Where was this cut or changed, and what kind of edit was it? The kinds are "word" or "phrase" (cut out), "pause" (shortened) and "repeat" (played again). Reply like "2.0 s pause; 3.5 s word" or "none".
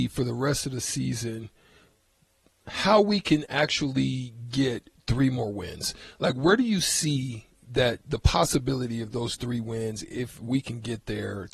none